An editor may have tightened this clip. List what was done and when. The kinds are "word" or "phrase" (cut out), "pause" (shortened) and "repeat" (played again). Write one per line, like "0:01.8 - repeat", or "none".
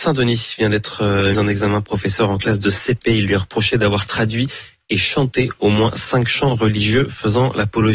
0:01.3 - word